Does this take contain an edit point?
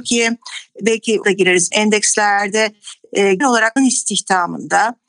yes; 4 cuts; at 1.2 s, 1.7 s, 3.4 s, 3.8 s

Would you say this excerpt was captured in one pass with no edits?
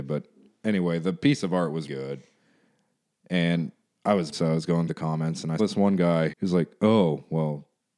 no; 5 cuts; at 1.9 s, 4.3 s, 4.9 s, 5.6 s, 6.3 s

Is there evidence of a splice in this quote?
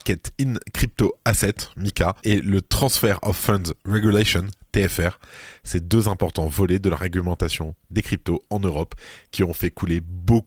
yes; 1 cut; at 2.2 s

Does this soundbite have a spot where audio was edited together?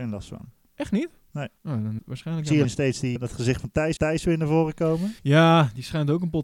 yes; 6 cuts; at 1.6 s, 2.0 s, 2.6 s, 3.2 s, 4.0 s, 5.2 s

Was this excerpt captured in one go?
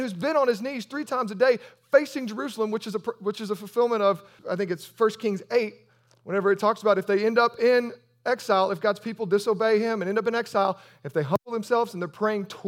no; 1 cut; at 4.4 s

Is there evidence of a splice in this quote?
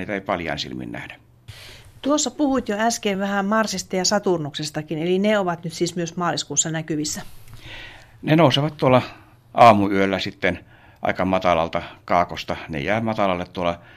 no; 0 cuts

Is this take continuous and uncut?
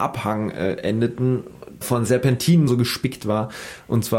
no; 2 cuts; at 1.8 s, 2.7 s

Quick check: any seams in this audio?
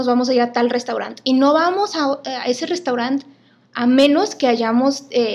no; 0 cuts

